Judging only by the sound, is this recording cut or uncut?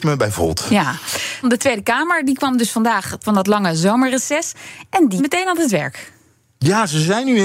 cut